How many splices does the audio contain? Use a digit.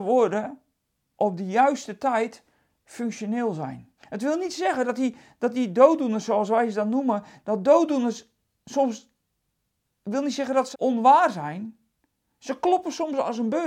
2